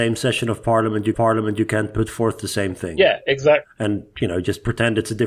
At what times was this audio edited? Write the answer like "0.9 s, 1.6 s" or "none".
1.1 s